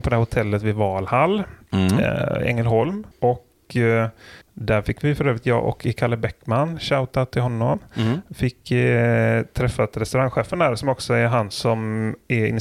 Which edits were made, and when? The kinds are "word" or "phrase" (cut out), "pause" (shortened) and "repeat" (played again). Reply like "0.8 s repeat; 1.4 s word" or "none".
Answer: 3.1 s pause; 4.4 s pause